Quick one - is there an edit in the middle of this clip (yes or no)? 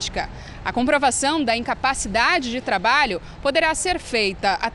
no